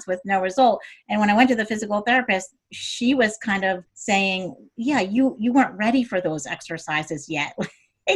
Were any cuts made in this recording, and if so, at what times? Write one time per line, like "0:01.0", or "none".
0:03.9